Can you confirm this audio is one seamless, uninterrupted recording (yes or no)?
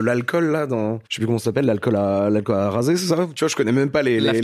no